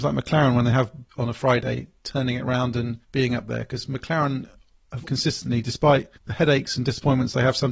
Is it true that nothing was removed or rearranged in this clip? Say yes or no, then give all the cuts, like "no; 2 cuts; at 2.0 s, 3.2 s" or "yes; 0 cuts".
no; 4 cuts; at 1.1 s, 3.0 s, 5.0 s, 6.2 s